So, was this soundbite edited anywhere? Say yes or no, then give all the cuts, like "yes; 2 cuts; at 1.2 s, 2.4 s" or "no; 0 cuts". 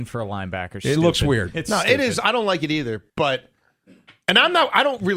yes; 1 cut; at 3.1 s